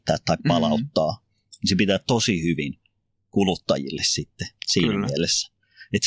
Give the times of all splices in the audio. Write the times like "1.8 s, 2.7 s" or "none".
3.2 s